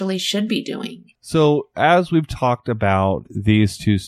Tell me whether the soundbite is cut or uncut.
cut